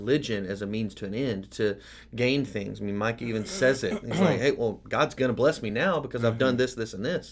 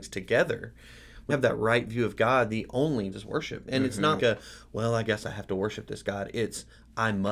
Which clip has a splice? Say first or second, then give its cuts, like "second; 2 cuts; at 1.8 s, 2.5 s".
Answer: second; 4 cuts; at 1.3 s, 2.5 s, 3.1 s, 4.2 s